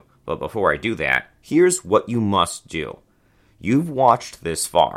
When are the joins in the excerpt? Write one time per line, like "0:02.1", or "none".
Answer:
none